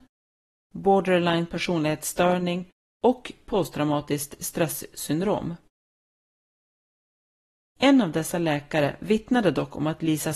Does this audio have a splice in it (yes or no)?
no